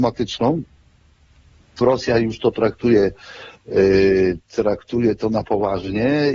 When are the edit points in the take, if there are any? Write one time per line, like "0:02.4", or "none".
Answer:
0:01.8